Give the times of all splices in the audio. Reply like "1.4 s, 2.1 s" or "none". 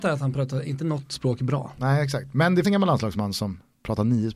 2.6 s